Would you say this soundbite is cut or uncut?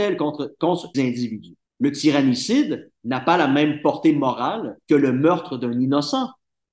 cut